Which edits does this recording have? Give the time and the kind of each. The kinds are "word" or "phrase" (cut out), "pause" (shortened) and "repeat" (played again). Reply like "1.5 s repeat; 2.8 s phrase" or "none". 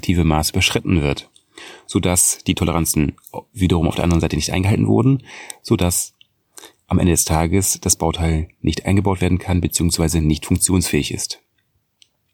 none